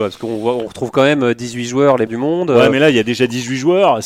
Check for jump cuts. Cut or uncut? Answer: cut